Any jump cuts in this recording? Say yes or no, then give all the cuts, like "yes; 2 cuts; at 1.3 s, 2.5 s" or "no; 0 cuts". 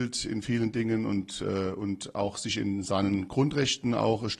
no; 0 cuts